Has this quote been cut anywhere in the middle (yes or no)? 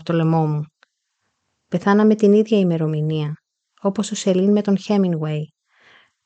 no